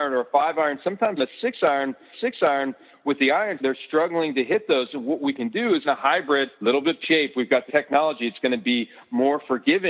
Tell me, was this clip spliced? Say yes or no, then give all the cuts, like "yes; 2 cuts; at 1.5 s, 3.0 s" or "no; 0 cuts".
yes; 7 cuts; at 1.2 s, 2.1 s, 3.6 s, 5.8 s, 6.5 s, 7.0 s, 7.7 s